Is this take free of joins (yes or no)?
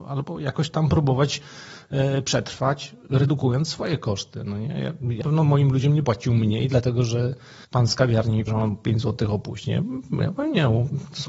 no